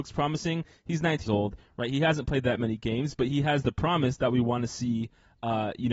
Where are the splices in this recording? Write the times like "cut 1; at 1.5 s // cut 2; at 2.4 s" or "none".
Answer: cut 1; at 1.3 s

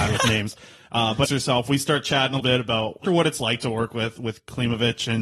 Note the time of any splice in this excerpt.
cut 1; at 1.2 s // cut 2; at 2.4 s // cut 3; at 3.0 s

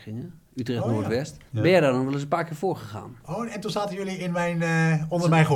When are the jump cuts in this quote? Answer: cut 1; at 1.5 s

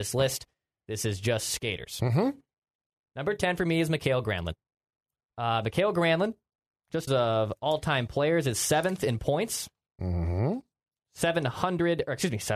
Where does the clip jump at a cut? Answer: cut 1; at 7.1 s

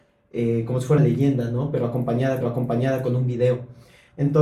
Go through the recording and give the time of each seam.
cut 1; at 1.0 s // cut 2; at 2.4 s

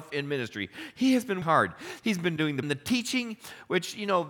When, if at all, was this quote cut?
cut 1; at 1.4 s // cut 2; at 2.6 s

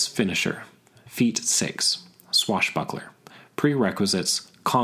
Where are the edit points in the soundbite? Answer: none

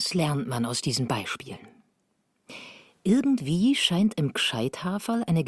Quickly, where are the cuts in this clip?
none

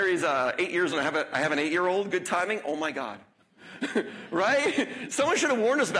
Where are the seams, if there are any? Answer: cut 1; at 0.9 s

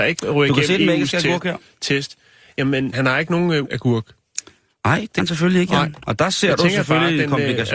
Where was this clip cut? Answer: cut 1; at 2.9 s // cut 2; at 3.6 s // cut 3; at 5.2 s

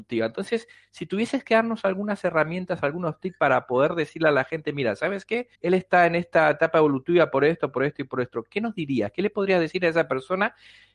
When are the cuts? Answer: cut 1; at 5.6 s

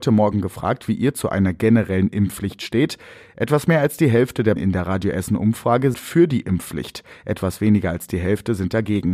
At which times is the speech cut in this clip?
cut 1; at 4.6 s // cut 2; at 5.9 s

